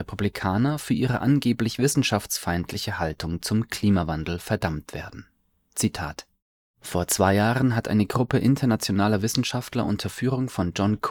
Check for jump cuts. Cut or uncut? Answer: uncut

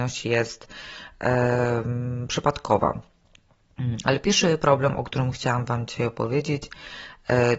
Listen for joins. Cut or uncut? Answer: uncut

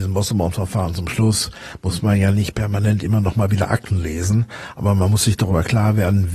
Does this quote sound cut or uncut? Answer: uncut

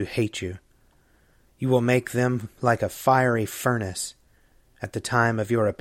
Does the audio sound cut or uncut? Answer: uncut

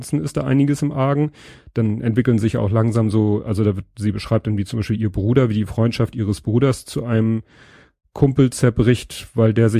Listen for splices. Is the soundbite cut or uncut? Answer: uncut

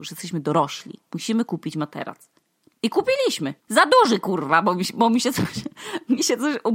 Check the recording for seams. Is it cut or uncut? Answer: cut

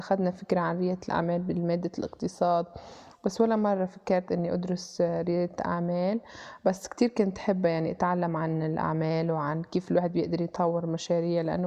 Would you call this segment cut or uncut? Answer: uncut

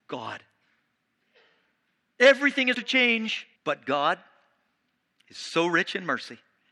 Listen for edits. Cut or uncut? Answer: cut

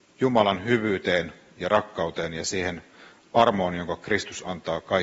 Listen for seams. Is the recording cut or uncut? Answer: uncut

